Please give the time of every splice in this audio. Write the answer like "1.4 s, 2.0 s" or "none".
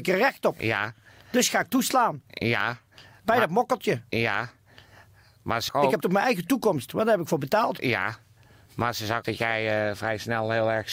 5.7 s, 6.0 s, 9.2 s